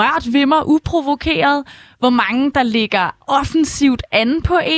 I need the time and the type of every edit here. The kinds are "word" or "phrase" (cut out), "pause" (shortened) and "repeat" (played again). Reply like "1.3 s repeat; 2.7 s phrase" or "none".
none